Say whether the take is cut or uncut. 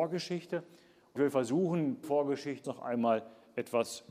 cut